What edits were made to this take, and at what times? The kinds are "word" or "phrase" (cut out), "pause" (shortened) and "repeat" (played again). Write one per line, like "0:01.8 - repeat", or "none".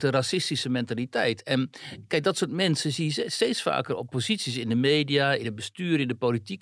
none